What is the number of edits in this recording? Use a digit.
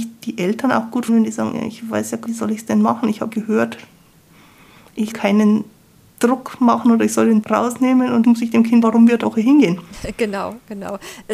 8